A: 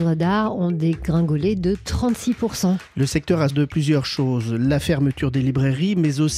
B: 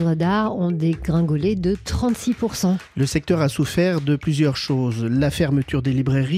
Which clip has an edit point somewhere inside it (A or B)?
A